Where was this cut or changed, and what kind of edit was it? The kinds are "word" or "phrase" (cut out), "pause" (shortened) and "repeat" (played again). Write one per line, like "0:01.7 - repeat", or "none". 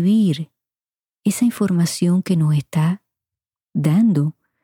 none